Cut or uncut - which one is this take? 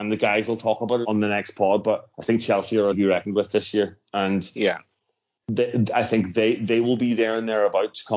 cut